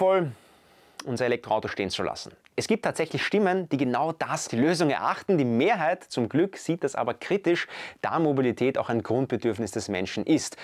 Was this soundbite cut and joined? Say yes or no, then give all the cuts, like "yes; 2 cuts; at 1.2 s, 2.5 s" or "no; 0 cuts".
yes; 1 cut; at 4.5 s